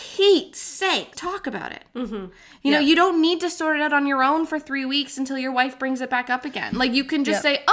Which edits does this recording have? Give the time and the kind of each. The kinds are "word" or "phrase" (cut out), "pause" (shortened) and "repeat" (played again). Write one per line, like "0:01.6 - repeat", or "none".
0:01.1 - word